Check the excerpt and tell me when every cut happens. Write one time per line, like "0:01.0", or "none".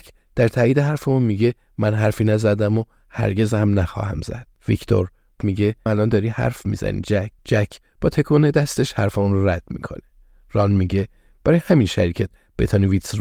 0:04.6
0:05.4
0:05.9
0:07.4